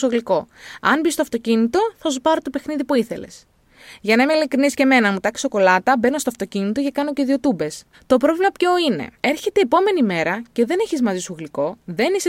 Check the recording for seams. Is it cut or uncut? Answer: cut